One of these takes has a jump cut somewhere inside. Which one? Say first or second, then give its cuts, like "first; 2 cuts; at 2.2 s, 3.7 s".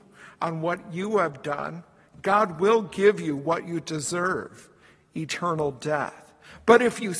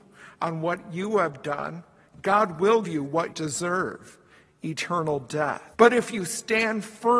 second; 3 cuts; at 2.8 s, 3.3 s, 5.7 s